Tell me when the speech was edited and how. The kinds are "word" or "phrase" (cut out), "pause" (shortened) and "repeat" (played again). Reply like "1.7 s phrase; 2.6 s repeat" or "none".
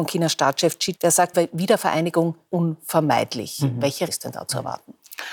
0.9 s word; 1.3 s word; 2.5 s word; 4.1 s word

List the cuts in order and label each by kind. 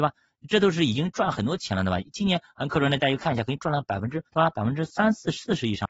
4.3 s pause

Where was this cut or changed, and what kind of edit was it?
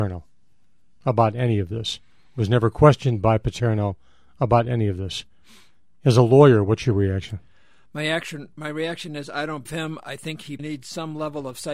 9.7 s word; 10.6 s word

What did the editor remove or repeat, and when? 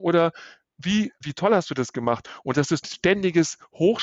1.2 s word; 2.8 s phrase

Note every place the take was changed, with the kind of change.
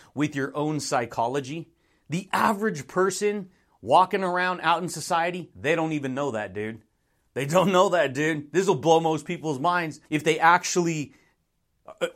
10.0 s pause

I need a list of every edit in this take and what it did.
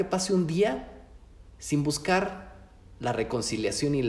none

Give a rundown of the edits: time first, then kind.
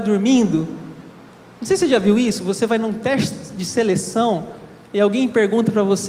1.3 s pause; 4.8 s pause

